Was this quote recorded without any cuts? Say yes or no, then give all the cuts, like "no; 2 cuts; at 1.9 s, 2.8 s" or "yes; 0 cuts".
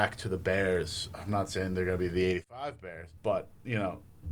no; 1 cut; at 3.2 s